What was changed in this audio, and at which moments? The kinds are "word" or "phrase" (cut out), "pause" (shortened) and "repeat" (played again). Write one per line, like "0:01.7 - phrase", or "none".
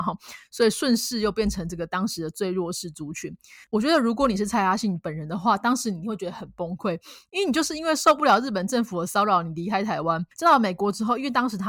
0:03.6 - pause
0:10.3 - pause